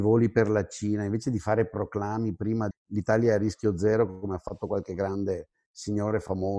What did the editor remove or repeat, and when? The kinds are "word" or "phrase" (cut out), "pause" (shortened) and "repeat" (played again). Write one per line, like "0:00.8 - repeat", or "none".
0:02.7 - word